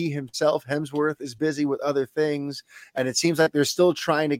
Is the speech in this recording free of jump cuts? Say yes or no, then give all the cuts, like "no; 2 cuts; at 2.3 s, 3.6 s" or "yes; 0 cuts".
yes; 0 cuts